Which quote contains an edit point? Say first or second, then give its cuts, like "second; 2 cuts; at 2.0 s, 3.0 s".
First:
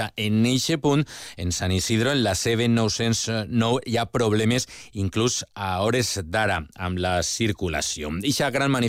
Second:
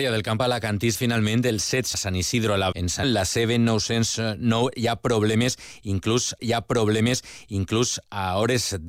second; 5 cuts; at 0.9 s, 1.9 s, 2.7 s, 3.0 s, 6.4 s